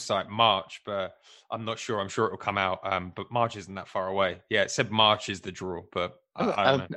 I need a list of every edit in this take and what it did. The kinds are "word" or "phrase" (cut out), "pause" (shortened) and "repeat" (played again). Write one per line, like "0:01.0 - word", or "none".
none